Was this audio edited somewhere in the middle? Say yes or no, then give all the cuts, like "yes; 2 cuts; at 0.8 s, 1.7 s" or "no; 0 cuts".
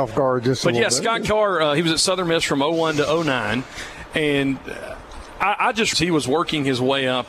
yes; 1 cut; at 5.9 s